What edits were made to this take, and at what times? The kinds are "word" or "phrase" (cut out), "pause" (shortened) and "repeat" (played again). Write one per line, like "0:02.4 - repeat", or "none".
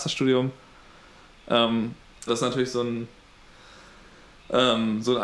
0:02.3 - word

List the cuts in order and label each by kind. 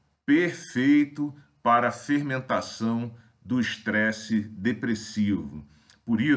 none

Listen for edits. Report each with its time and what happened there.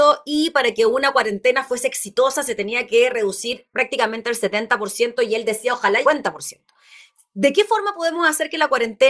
0:06.0 - phrase

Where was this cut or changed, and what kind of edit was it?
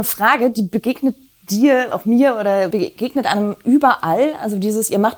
0:01.9 - word
0:02.7 - word

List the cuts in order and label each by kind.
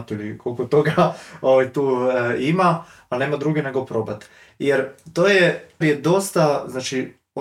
0:05.8 - word

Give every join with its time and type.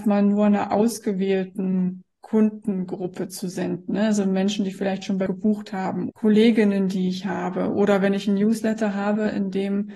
0:05.3 - word
0:06.1 - word

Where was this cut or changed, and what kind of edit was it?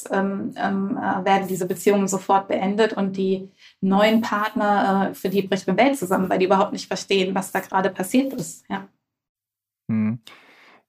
none

